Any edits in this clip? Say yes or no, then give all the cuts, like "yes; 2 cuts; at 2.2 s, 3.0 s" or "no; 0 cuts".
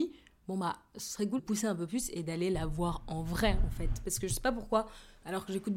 yes; 1 cut; at 1.4 s